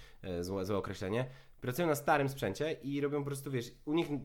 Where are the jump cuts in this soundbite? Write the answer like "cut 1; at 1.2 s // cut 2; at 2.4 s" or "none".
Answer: none